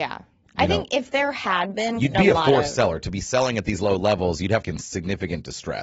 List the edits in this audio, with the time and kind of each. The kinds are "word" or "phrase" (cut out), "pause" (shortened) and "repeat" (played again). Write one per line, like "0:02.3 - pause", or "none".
0:02.1 - word
0:04.6 - phrase